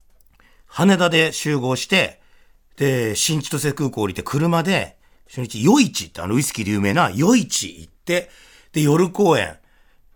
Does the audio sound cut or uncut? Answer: uncut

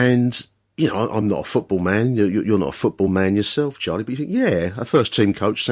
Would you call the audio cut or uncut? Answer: uncut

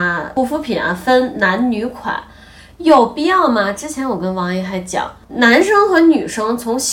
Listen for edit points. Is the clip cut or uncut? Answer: uncut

